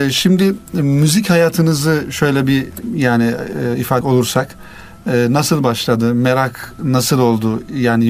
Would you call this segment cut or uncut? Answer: cut